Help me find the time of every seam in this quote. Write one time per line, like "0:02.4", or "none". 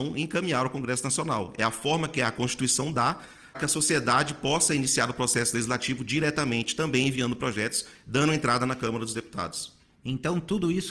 0:03.5